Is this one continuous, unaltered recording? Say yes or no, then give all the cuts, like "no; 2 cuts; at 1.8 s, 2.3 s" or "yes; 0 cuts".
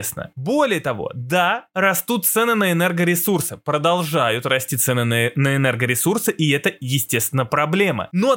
yes; 0 cuts